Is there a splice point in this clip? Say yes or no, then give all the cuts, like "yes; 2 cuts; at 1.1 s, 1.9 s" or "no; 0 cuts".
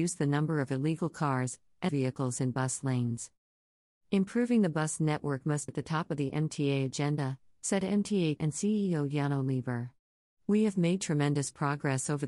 yes; 3 cuts; at 1.9 s, 5.7 s, 8.4 s